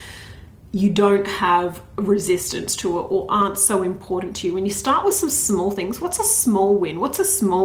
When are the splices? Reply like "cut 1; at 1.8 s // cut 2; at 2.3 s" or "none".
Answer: none